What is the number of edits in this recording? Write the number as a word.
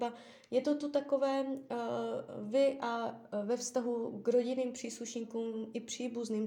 zero